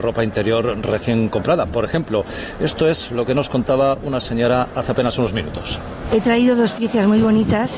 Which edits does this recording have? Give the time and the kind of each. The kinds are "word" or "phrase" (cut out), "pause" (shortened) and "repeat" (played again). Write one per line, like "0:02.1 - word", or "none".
none